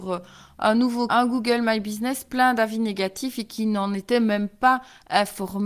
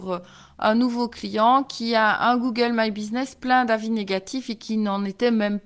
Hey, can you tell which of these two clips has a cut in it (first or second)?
first